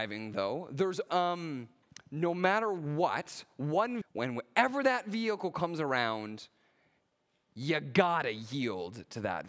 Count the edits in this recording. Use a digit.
2